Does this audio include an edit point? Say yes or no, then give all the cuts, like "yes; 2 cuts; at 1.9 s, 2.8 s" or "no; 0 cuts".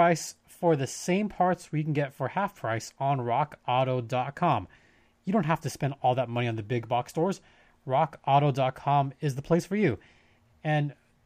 no; 0 cuts